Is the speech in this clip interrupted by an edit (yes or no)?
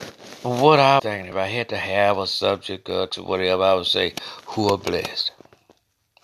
yes